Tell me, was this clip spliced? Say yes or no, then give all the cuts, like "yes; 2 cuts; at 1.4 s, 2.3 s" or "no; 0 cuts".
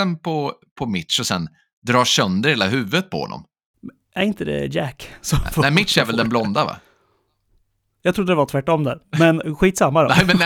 no; 0 cuts